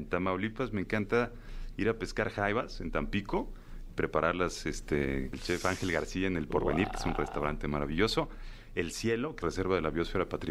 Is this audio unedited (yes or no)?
no